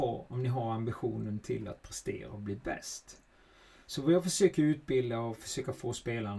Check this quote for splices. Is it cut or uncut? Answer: uncut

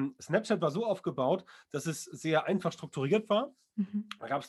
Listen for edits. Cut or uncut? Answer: uncut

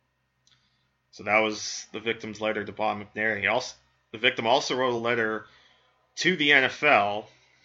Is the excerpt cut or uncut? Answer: uncut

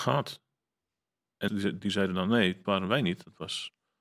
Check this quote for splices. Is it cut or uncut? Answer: cut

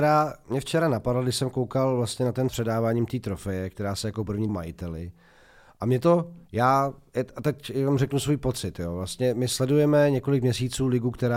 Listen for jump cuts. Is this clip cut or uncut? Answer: cut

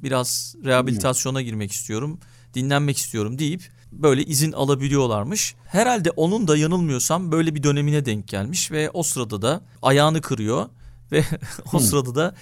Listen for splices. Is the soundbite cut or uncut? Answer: uncut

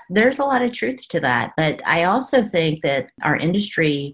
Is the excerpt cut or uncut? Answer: uncut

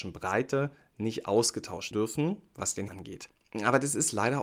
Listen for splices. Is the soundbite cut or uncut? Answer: cut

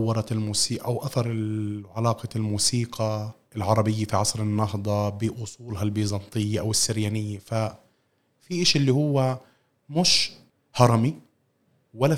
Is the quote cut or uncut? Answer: uncut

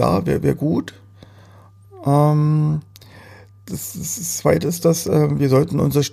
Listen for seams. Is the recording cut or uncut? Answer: uncut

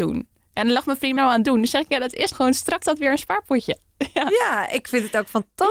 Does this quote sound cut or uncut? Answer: cut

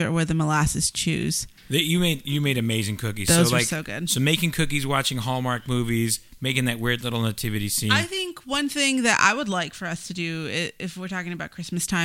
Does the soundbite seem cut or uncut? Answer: uncut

